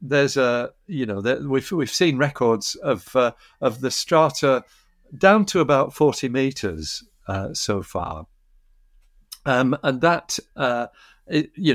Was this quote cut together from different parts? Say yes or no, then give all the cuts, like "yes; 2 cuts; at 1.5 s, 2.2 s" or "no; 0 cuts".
no; 0 cuts